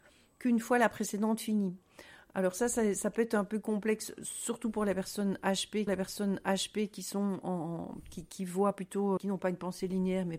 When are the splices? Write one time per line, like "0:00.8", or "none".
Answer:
0:05.9
0:07.4
0:09.2